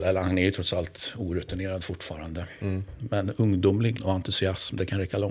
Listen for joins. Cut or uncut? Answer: cut